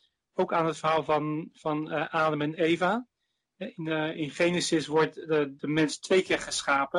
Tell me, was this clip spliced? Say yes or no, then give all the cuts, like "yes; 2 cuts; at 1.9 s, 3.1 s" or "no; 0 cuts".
no; 0 cuts